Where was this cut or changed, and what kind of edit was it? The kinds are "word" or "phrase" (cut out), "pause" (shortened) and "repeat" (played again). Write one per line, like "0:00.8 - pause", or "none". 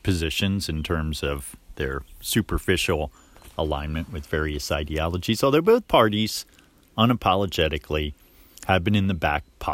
none